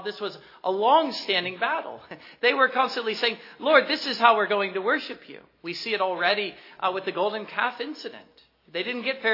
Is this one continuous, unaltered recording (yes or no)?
yes